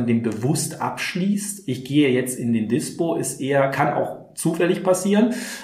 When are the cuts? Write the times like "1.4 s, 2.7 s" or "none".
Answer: none